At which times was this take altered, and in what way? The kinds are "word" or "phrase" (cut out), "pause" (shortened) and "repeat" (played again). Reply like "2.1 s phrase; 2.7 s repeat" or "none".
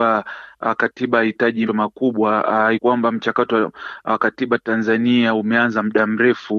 1.7 s word; 2.8 s word